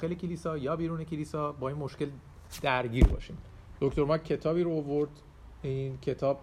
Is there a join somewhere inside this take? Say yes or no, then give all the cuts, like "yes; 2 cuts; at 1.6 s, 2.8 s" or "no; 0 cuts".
no; 0 cuts